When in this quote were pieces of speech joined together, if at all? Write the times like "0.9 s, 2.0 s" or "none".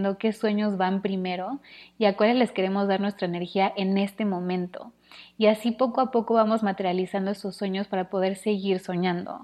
none